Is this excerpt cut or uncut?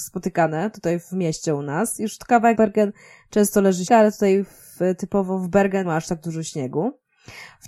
cut